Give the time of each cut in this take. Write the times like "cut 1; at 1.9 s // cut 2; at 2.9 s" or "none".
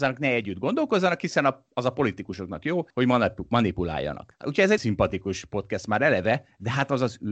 cut 1; at 2.9 s // cut 2; at 4.8 s